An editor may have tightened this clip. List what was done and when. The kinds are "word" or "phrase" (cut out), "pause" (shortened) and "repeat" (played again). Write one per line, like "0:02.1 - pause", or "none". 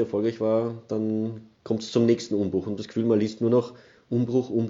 0:02.8 - phrase